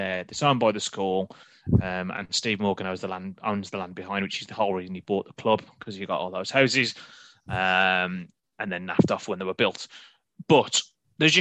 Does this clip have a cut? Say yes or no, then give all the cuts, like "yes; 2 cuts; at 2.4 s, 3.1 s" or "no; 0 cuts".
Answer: no; 0 cuts